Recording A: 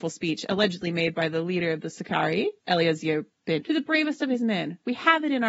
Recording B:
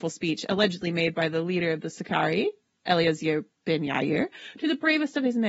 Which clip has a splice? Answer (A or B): A